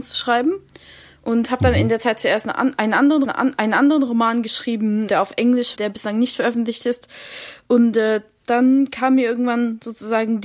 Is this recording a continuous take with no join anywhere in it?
no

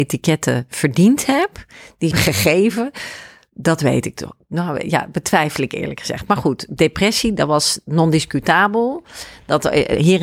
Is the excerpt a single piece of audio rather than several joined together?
no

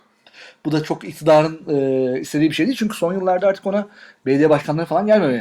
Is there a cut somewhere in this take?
no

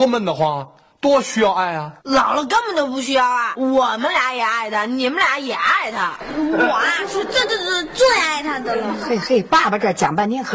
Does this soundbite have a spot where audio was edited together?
yes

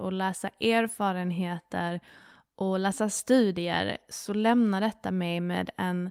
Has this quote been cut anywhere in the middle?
no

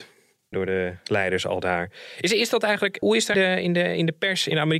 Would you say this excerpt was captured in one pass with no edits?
no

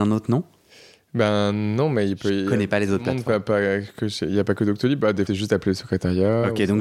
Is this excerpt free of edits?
no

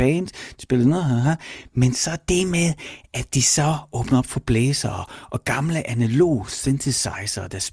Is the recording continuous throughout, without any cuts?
yes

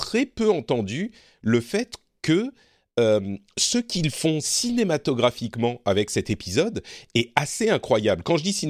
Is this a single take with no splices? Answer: yes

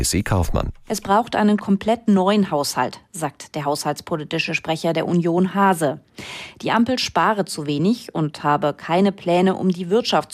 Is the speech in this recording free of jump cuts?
yes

